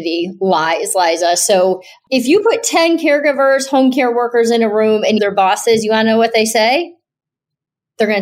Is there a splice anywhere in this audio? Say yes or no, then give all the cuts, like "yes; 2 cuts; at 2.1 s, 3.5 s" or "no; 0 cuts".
yes; 1 cut; at 5.2 s